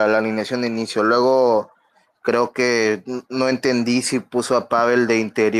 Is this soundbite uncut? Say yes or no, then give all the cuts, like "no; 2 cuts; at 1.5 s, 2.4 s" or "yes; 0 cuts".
yes; 0 cuts